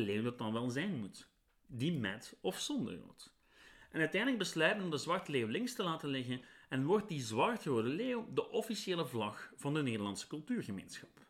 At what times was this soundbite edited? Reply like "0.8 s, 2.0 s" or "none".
none